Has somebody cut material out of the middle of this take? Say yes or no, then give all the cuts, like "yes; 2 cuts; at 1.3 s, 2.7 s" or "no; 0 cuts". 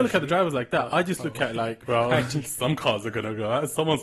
no; 0 cuts